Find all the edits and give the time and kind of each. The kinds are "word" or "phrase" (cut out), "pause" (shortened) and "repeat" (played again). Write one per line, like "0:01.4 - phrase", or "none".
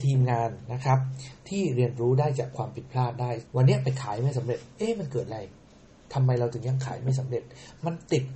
0:03.4 - phrase
0:04.7 - pause